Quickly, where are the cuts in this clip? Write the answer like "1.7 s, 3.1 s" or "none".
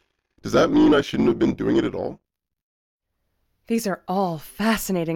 none